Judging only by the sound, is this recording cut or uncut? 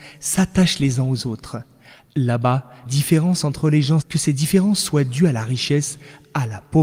cut